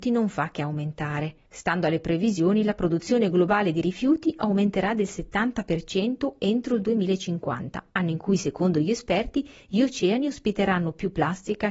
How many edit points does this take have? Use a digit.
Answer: 2